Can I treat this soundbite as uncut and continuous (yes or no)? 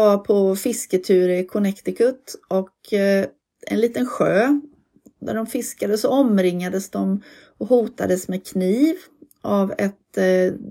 yes